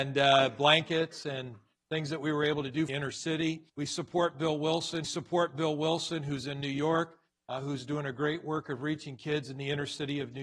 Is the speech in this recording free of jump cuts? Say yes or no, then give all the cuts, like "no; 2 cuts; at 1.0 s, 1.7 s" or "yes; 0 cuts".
no; 3 cuts; at 2.9 s, 3.7 s, 5.0 s